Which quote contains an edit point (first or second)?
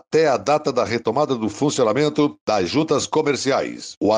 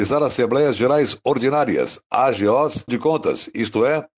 second